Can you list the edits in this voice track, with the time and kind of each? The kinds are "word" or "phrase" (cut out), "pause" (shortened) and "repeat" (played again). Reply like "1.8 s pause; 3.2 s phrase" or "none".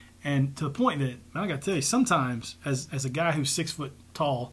1.3 s pause